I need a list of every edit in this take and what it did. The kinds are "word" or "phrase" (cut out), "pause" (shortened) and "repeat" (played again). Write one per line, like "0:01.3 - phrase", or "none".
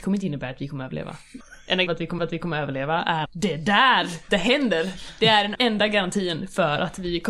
0:01.9 - word
0:02.2 - repeat
0:03.2 - word
0:04.3 - word
0:05.5 - word